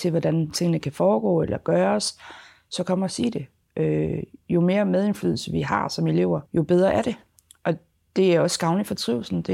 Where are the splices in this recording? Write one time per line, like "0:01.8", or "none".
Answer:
none